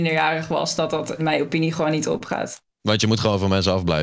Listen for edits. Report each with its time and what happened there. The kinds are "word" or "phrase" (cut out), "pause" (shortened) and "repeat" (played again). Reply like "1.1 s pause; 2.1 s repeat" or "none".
1.2 s word